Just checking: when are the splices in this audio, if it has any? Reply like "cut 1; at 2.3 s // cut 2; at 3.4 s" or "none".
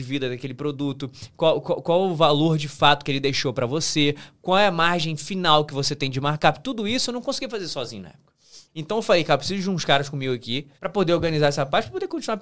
cut 1; at 8.7 s // cut 2; at 10.8 s